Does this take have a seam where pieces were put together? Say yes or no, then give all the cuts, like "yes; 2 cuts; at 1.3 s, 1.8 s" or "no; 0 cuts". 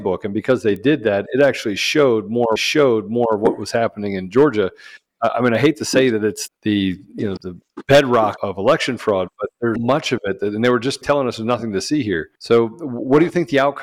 yes; 7 cuts; at 2.6 s, 6.5 s, 7.4 s, 8.4 s, 9.8 s, 11.0 s, 12.3 s